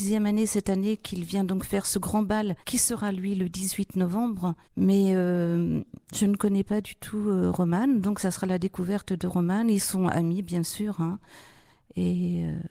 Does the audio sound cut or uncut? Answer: cut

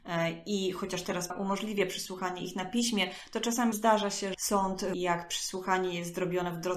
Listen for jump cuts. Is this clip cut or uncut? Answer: cut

